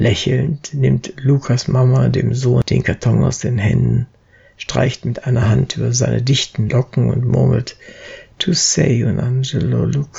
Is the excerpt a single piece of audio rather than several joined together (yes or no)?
yes